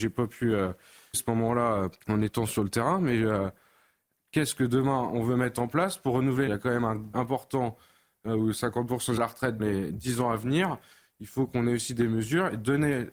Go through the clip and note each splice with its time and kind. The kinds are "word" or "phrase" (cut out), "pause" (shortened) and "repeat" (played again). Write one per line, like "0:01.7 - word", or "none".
0:01.1 - word
0:02.0 - pause
0:06.5 - phrase
0:07.1 - word
0:09.2 - phrase
0:09.6 - word